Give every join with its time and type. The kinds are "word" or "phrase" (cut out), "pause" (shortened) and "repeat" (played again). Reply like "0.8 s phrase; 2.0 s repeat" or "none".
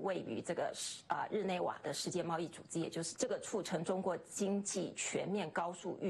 3.2 s word